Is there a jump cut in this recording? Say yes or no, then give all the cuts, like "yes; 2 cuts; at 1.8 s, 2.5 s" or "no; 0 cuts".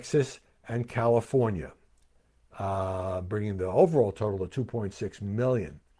no; 0 cuts